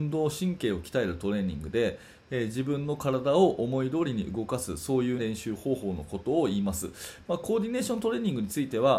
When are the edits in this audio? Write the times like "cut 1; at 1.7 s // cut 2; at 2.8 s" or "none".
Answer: cut 1; at 5.2 s

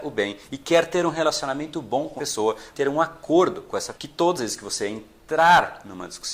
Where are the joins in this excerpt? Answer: cut 1; at 2.2 s // cut 2; at 2.7 s // cut 3; at 3.9 s // cut 4; at 4.4 s

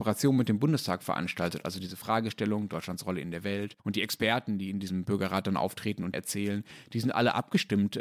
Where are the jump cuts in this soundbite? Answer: cut 1; at 3.8 s // cut 2; at 6.1 s

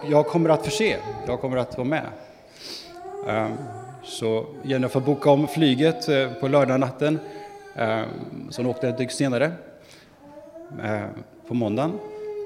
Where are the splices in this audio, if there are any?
none

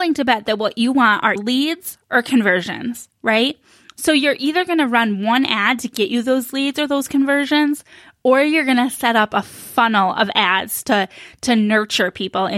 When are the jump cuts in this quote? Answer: cut 1; at 1.4 s

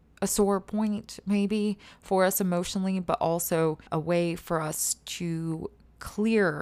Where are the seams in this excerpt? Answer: cut 1; at 3.9 s

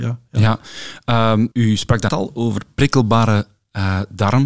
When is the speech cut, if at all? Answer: cut 1; at 1.5 s // cut 2; at 2.1 s

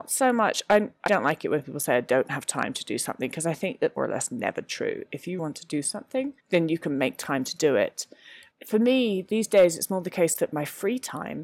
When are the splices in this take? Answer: cut 1; at 1.1 s // cut 2; at 4.0 s // cut 3; at 5.4 s // cut 4; at 6.4 s // cut 5; at 8.5 s

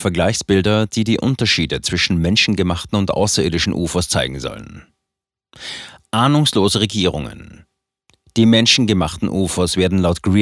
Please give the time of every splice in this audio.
none

